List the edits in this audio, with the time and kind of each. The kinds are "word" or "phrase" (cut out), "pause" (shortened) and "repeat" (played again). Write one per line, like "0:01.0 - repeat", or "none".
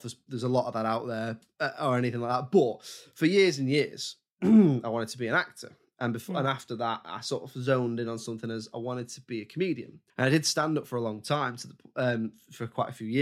0:10.1 - pause

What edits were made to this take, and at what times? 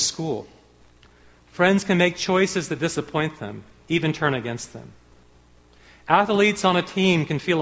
none

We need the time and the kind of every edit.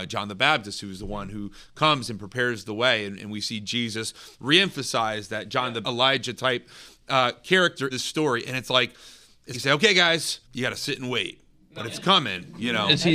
0:05.8 - phrase
0:07.9 - word
0:09.5 - word
0:10.4 - pause

